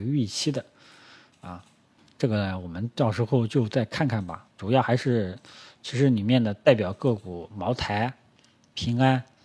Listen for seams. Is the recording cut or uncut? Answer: cut